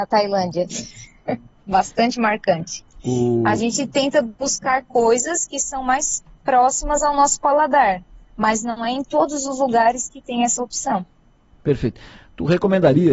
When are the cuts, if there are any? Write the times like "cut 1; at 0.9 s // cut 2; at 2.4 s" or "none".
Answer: none